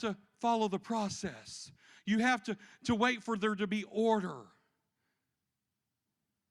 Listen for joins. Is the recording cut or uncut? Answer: uncut